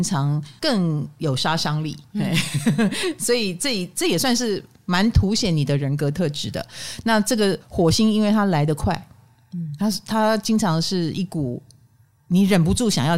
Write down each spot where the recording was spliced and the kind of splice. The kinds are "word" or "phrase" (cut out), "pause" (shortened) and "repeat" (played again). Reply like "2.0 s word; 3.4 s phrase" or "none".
7.6 s pause